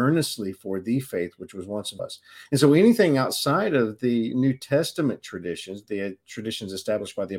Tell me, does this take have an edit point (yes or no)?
yes